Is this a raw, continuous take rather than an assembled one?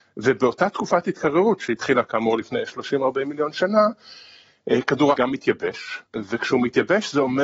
no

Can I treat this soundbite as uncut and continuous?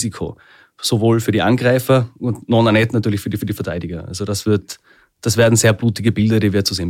no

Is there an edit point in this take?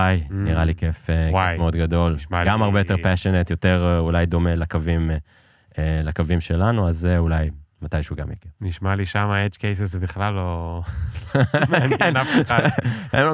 no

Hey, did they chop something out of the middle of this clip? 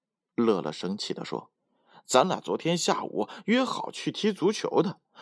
yes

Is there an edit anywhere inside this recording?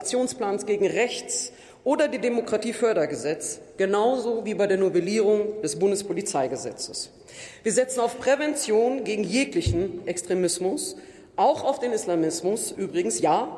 no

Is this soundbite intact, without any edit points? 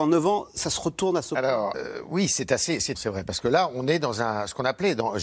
no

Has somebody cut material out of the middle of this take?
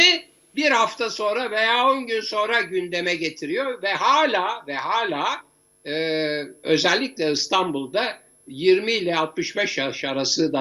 no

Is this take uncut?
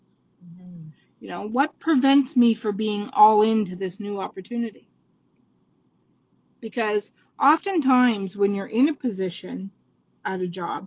yes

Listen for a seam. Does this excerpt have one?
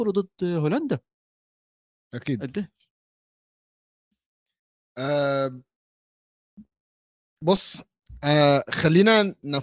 no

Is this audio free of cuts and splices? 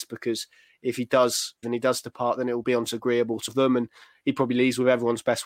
no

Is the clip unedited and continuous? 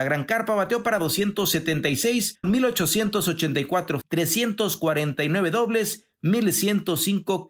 no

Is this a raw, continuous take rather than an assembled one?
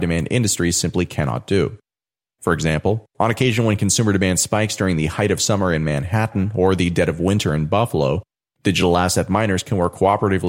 yes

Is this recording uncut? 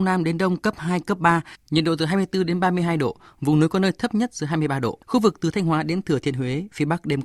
no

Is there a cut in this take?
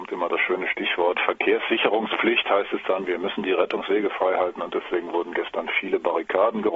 no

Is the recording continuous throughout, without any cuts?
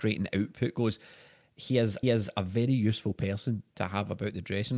no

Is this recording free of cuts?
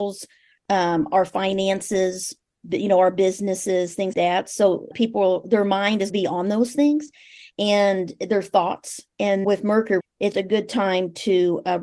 no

